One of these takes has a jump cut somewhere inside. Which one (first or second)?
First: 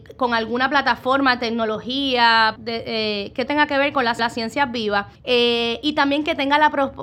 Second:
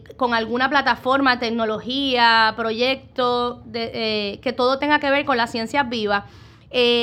first